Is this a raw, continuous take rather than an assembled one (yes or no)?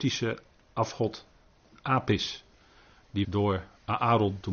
no